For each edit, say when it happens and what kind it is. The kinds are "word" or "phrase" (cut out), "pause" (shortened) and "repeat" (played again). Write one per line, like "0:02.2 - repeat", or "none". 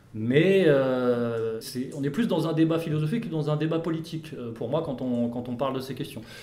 0:01.6 - word